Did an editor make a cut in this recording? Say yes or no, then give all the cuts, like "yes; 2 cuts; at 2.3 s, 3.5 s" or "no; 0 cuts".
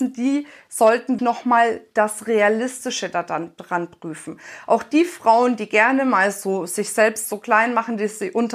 yes; 1 cut; at 1.2 s